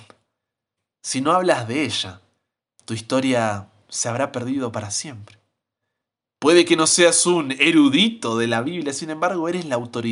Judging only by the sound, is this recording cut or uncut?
uncut